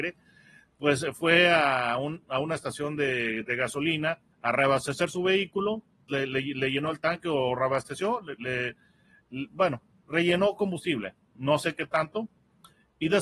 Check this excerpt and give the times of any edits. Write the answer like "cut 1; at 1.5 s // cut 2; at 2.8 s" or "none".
cut 1; at 4.3 s // cut 2; at 6.1 s